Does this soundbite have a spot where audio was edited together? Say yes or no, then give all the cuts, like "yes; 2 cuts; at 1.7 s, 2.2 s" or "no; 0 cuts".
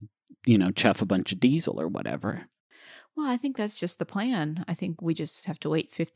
no; 0 cuts